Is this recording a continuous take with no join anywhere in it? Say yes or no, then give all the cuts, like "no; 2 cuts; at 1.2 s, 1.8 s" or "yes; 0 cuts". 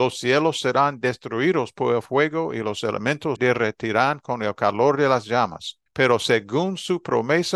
no; 2 cuts; at 3.4 s, 5.9 s